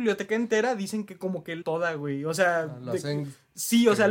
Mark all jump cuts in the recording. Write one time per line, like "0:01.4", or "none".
0:01.6